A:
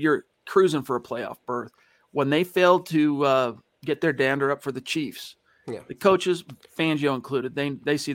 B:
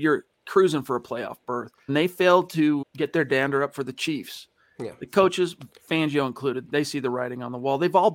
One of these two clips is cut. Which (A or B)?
B